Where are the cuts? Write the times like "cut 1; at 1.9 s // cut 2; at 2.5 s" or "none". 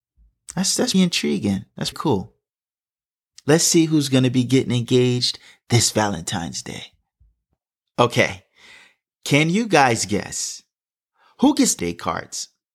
cut 1; at 0.9 s // cut 2; at 1.9 s // cut 3; at 11.8 s